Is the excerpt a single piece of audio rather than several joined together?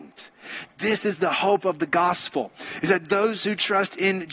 yes; 0 cuts

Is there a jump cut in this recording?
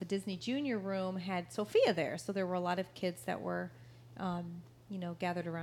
no; 0 cuts

